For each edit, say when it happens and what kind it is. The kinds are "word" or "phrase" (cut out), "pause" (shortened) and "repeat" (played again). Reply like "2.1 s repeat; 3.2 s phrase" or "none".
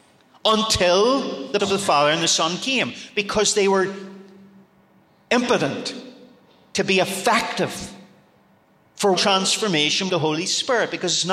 1.6 s word; 9.2 s word; 10.1 s word